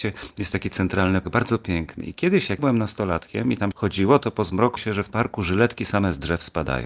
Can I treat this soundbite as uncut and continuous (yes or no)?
no